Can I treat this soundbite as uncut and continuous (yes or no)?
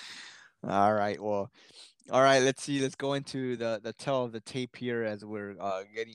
yes